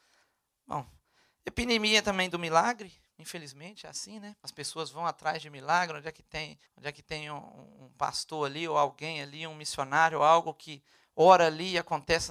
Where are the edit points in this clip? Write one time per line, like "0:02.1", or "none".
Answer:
0:04.4
0:06.7